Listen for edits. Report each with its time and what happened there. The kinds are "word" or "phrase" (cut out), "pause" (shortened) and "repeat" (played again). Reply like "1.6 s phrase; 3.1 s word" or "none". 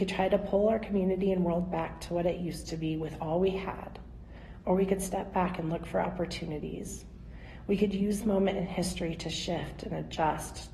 8.2 s word